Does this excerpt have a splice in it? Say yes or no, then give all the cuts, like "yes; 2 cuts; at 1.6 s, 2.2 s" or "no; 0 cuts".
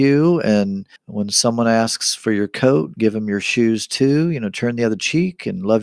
yes; 1 cut; at 1.0 s